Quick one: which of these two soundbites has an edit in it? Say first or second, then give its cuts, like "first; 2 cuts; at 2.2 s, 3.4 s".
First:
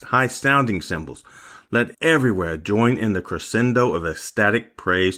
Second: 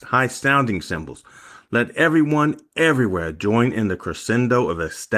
first; 1 cut; at 1.9 s